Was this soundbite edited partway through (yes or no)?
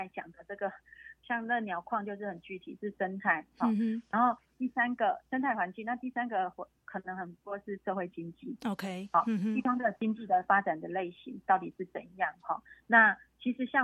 yes